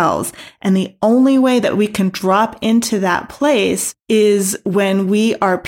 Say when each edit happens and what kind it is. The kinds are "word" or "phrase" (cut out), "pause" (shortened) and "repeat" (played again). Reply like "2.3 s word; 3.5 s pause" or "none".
4.0 s pause